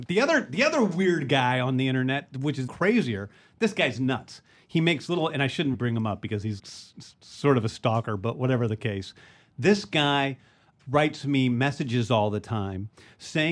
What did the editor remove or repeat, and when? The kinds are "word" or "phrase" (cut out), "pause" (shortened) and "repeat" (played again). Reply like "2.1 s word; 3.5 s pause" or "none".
2.7 s word; 5.7 s word; 6.6 s word; 10.8 s word